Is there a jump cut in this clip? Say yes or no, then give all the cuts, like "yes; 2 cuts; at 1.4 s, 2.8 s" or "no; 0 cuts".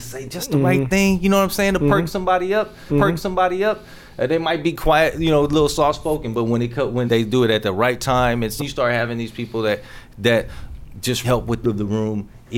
yes; 5 cuts; at 2.9 s, 7.1 s, 8.6 s, 11.2 s, 11.6 s